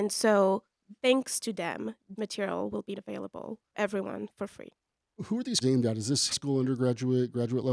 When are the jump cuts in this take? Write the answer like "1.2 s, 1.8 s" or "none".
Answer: 1.0 s, 2.2 s, 2.9 s, 3.7 s, 5.6 s, 6.3 s